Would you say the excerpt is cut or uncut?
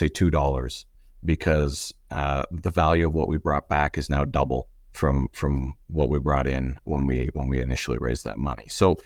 uncut